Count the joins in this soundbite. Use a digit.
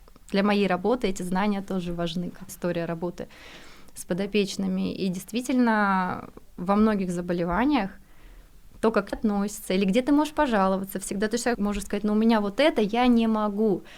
3